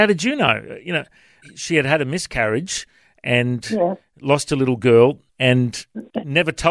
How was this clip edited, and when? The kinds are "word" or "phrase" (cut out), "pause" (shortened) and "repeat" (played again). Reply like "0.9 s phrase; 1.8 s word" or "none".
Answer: 1.4 s word; 5.3 s pause